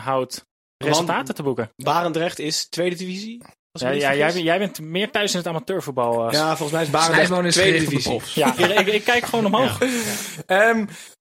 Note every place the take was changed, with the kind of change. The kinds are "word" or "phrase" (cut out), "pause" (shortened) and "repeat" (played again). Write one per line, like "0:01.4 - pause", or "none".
0:06.3 - word
0:08.6 - word

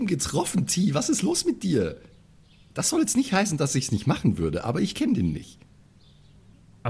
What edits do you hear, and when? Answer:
none

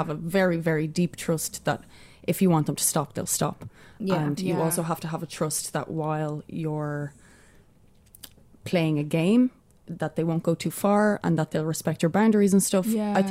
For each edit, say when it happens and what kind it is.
none

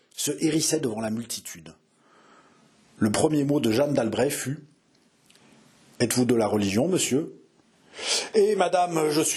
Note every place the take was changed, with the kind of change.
none

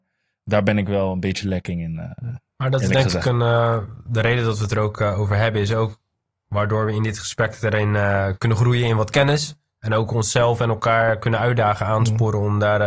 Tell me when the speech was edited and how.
none

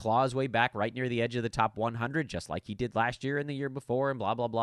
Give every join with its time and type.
none

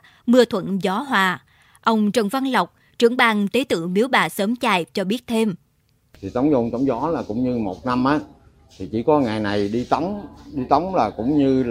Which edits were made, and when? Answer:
none

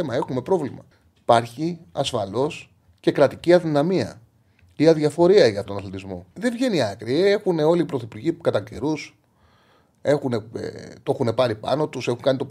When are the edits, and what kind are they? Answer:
0:00.9 - pause
0:05.7 - phrase
0:06.3 - pause

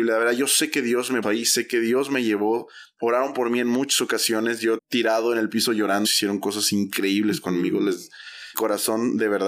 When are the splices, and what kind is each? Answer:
0:01.2 - word
0:04.8 - word
0:06.0 - phrase
0:08.5 - word

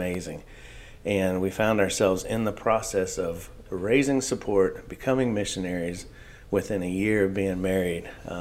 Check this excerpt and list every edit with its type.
none

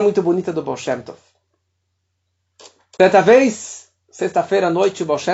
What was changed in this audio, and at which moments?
none

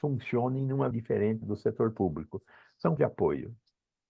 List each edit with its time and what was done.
0:00.9 - word
0:01.4 - word
0:03.0 - word

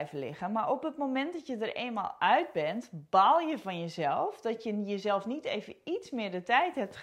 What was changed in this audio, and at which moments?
none

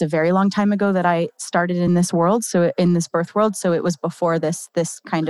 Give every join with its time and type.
none

